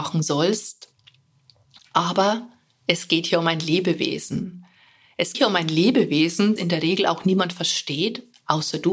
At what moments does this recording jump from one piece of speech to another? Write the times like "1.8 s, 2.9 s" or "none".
5.3 s, 6.6 s

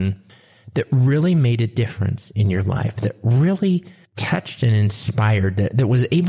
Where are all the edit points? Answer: 4.0 s

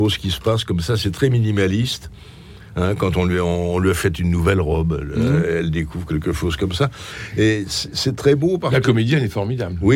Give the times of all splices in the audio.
7.9 s, 8.8 s

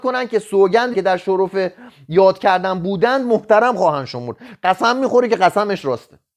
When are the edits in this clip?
0.9 s

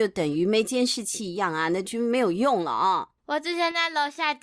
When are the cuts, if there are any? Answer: 3.2 s

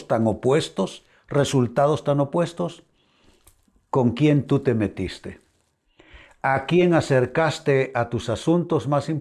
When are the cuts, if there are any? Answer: none

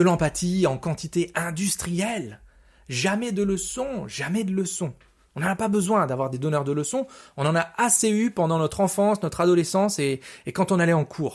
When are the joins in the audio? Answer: none

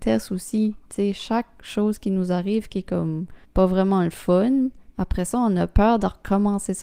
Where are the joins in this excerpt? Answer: 3.4 s, 4.9 s

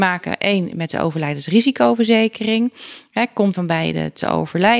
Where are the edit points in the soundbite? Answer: 3.5 s

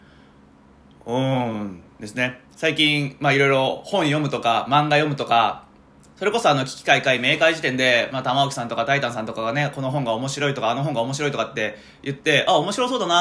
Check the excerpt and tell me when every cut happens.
2.5 s, 5.9 s

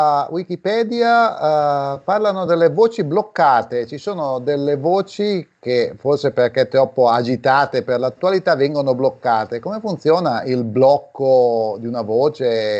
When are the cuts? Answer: none

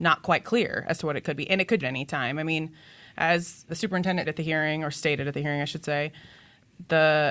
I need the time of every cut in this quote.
1.8 s, 3.7 s, 4.2 s

